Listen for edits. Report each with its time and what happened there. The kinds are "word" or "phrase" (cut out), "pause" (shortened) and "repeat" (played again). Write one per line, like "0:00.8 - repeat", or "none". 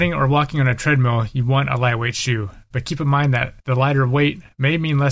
0:03.6 - pause